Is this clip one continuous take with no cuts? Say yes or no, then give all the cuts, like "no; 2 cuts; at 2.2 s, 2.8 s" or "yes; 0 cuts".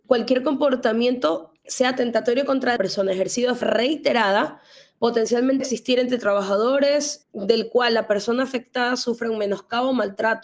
no; 5 cuts; at 1.6 s, 2.8 s, 3.6 s, 5.6 s, 7.2 s